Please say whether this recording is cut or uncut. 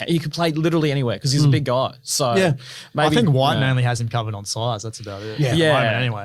uncut